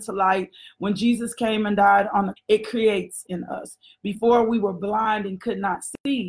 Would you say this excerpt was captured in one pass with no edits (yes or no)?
no